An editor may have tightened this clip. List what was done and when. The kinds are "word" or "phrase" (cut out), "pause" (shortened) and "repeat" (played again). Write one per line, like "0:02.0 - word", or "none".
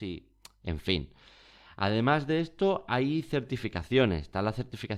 none